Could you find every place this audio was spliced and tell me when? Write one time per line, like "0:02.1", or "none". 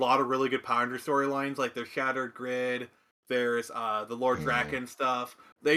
none